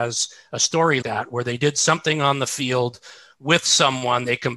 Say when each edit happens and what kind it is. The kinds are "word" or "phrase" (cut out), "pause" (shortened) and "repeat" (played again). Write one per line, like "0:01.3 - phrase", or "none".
0:01.0 - word